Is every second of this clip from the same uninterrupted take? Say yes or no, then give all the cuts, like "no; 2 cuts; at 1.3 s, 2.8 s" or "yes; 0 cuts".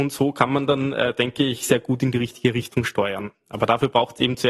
yes; 0 cuts